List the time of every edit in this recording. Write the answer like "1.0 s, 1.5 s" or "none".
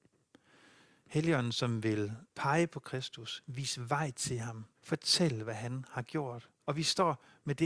2.3 s, 4.8 s, 6.6 s